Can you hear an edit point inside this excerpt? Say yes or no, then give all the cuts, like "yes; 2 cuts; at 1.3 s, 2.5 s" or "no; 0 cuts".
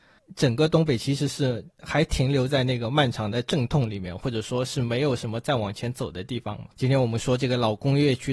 yes; 1 cut; at 6.7 s